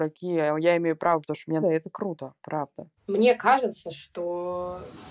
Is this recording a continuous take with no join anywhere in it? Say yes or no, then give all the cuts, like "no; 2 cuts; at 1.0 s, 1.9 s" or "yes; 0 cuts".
no; 3 cuts; at 1.2 s, 1.6 s, 3.0 s